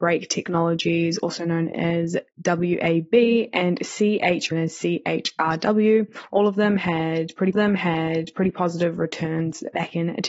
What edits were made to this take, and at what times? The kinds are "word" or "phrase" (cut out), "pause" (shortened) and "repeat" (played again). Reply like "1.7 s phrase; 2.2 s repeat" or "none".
2.3 s pause; 4.5 s phrase; 7.5 s repeat